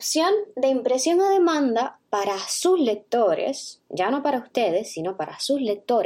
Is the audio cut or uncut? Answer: uncut